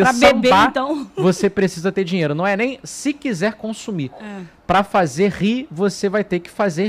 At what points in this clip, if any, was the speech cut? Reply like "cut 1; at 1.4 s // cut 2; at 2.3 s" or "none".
none